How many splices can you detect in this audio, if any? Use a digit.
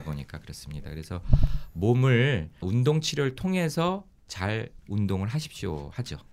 2